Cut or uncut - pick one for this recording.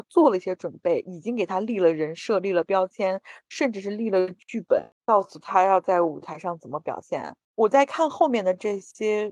cut